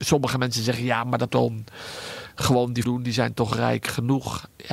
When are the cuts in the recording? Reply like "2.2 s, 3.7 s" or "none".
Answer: 1.3 s, 2.8 s